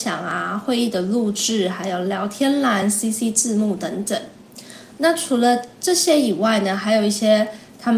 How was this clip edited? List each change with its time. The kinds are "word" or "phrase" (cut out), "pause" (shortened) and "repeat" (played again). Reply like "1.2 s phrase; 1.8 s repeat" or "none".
none